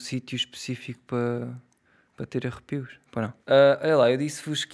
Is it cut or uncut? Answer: cut